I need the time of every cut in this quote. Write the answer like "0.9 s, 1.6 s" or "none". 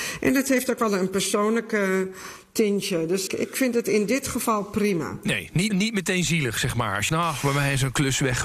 3.3 s, 5.7 s, 7.1 s, 7.4 s